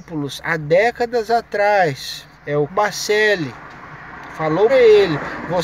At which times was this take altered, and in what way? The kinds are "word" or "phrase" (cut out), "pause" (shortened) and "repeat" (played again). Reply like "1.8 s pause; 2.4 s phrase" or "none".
2.3 s pause; 2.7 s word; 4.7 s word